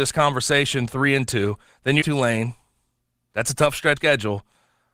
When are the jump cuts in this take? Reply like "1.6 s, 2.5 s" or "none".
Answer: 2.0 s, 4.0 s